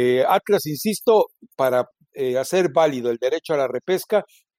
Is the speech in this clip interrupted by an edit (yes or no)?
no